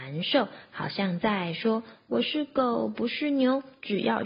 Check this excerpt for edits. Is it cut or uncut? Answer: uncut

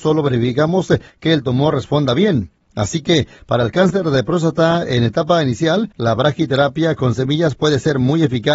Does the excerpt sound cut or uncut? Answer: uncut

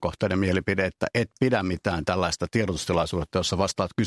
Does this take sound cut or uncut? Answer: uncut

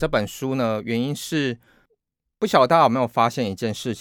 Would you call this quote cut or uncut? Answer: uncut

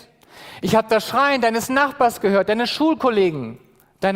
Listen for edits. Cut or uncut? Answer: uncut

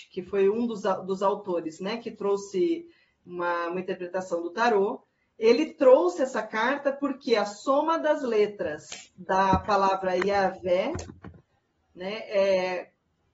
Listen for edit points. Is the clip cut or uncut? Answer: uncut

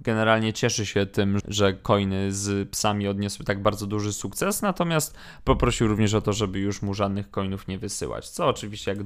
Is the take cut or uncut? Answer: cut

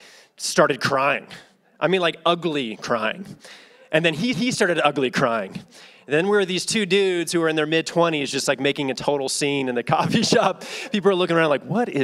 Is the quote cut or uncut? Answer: cut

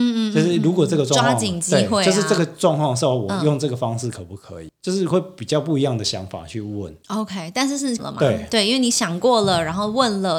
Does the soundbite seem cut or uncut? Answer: cut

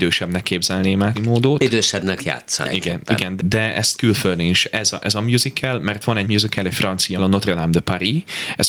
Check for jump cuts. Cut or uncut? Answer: cut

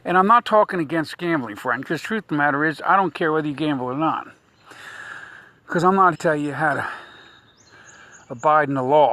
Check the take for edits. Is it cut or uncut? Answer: cut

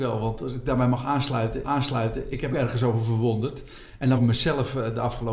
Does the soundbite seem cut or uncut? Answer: cut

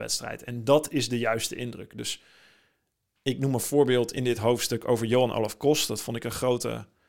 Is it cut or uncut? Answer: uncut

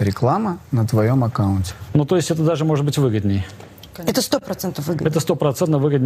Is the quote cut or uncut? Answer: uncut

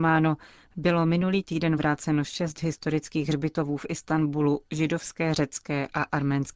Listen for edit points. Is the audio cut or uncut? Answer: uncut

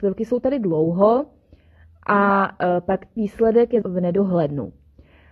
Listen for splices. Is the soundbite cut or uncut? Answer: cut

